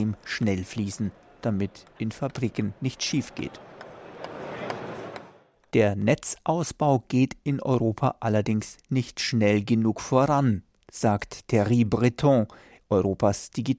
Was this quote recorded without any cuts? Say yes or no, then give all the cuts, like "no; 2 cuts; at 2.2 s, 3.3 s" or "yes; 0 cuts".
yes; 0 cuts